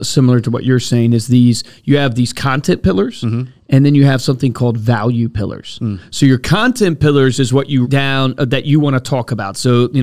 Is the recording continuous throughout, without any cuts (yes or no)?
no